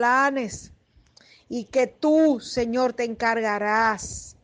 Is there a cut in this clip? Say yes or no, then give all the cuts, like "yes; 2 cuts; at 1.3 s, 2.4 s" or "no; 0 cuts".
no; 0 cuts